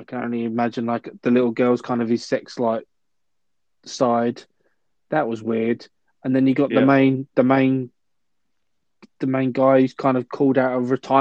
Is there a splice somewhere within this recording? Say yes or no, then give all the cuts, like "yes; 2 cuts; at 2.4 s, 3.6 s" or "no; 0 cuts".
no; 0 cuts